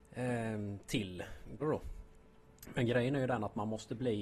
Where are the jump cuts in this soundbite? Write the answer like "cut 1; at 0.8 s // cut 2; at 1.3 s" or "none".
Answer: cut 1; at 1.6 s